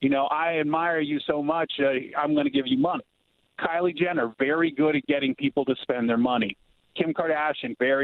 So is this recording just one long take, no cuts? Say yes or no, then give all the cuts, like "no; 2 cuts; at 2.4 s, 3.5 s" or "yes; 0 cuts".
yes; 0 cuts